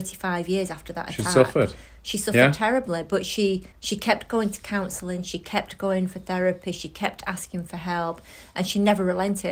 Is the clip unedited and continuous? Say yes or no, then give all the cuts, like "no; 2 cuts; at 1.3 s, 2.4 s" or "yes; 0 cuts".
no; 1 cut; at 3.7 s